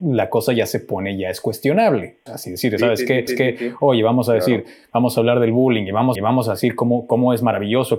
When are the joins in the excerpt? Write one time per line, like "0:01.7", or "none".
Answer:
0:02.3
0:03.3
0:06.2